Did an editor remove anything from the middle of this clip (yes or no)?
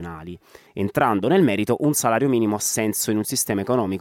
no